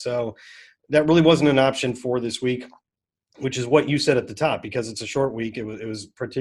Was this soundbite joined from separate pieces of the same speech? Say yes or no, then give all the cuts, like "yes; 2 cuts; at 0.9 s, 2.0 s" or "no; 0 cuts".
no; 0 cuts